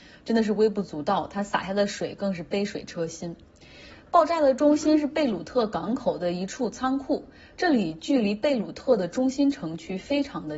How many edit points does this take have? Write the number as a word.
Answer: zero